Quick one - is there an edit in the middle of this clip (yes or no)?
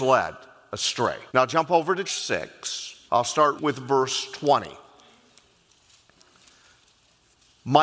yes